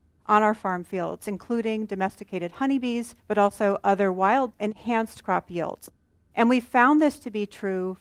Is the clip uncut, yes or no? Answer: no